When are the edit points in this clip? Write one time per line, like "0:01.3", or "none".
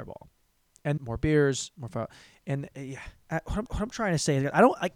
0:01.0
0:03.2
0:03.7